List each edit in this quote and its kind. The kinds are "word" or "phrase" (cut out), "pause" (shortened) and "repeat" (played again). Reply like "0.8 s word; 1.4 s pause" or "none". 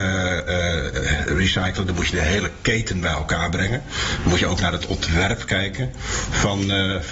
none